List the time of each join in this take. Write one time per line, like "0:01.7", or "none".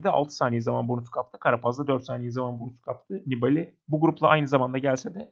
0:03.8